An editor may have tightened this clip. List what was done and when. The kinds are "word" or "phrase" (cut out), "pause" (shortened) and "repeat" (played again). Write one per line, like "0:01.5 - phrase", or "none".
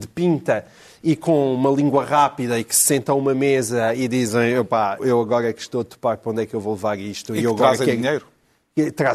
0:05.0 - word